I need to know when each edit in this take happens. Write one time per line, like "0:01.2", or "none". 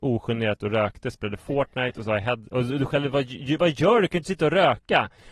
none